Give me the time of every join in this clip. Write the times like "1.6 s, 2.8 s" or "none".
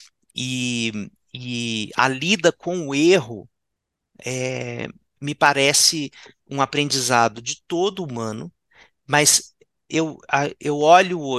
8.7 s

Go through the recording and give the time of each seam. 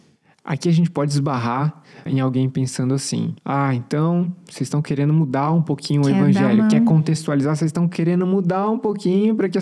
2.1 s, 3.4 s

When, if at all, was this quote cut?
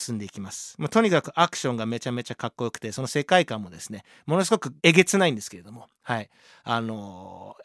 4.8 s

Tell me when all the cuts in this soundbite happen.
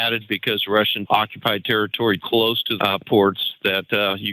1.1 s, 2.2 s, 2.8 s

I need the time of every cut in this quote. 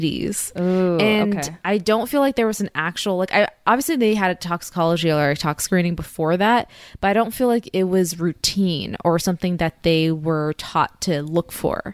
none

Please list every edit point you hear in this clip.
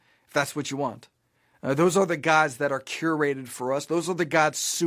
none

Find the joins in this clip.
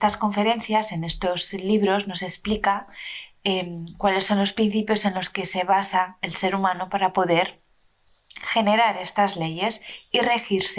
none

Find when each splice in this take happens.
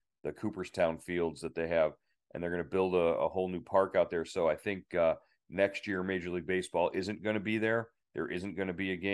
none

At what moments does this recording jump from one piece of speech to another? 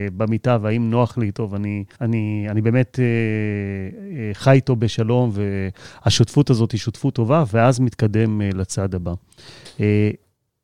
1.9 s

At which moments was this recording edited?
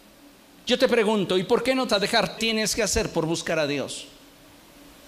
1.9 s, 2.4 s

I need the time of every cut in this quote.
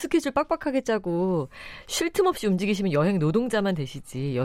none

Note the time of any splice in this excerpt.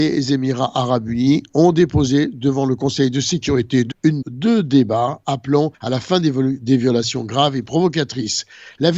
3.9 s, 4.2 s, 5.7 s

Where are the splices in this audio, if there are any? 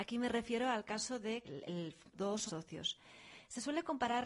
1.4 s, 2.1 s, 2.5 s

